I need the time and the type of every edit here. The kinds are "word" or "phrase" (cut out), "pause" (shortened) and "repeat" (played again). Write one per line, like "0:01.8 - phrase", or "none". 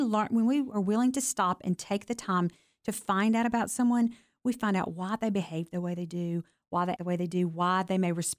0:07.0 - word